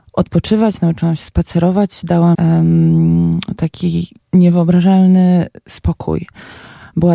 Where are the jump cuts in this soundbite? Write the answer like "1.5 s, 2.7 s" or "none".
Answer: 2.3 s, 4.2 s